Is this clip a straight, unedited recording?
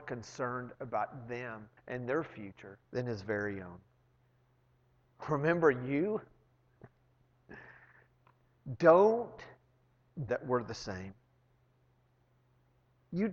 no; 4 cuts; at 1.8 s, 2.8 s, 4.2 s, 10.3 s

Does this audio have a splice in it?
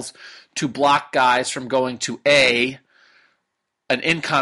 no; 0 cuts

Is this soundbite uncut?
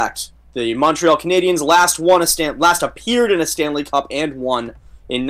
yes; 0 cuts

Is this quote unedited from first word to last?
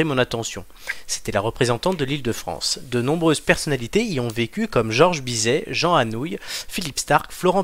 yes; 0 cuts

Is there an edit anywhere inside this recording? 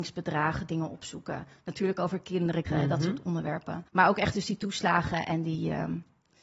yes; 2 cuts; at 2.7 s, 3.9 s

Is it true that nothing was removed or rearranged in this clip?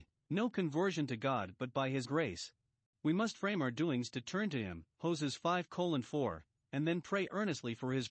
no; 2 cuts; at 2.0 s, 4.9 s

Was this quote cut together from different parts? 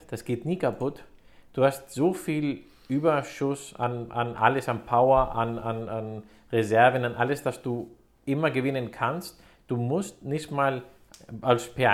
no; 0 cuts

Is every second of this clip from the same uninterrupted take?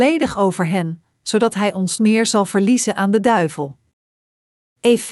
no; 1 cut; at 2.0 s

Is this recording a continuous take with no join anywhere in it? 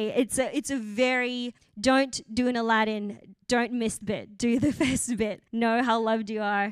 no; 3 cuts; at 1.6 s, 4.0 s, 5.5 s

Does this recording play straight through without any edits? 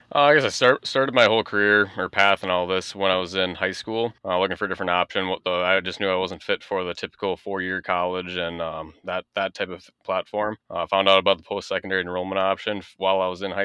no; 2 cuts; at 4.2 s, 10.6 s

